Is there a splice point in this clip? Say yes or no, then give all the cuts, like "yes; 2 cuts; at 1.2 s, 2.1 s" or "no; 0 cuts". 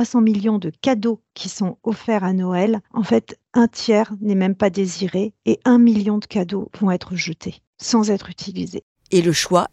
yes; 1 cut; at 2.8 s